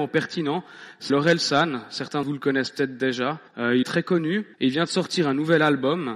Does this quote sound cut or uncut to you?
cut